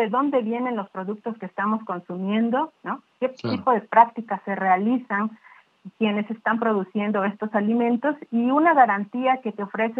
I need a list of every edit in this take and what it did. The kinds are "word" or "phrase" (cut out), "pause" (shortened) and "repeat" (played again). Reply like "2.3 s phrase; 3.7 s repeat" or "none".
none